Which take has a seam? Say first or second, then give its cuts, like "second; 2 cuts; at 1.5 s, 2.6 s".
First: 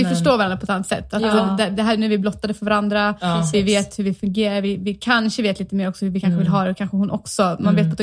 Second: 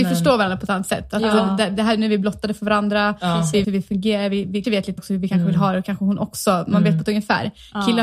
second; 3 cuts; at 3.6 s, 4.6 s, 5.0 s